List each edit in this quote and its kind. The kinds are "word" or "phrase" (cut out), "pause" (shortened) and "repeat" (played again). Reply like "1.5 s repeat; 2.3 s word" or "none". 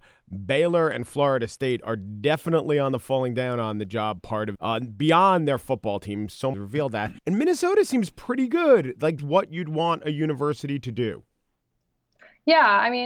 4.6 s word; 6.5 s phrase; 7.2 s pause; 9.2 s phrase

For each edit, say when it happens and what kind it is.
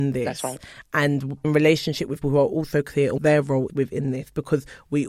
1.4 s word; 2.2 s word; 3.2 s word; 3.7 s word

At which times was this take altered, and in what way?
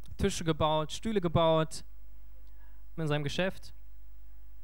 3.0 s phrase

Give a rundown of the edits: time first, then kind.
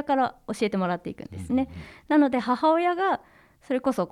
none

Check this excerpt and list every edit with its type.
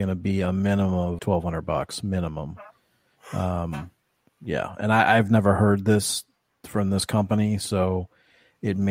1.2 s word

